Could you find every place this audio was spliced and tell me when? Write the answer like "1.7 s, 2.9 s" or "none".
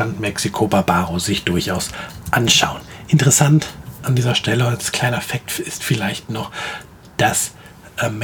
none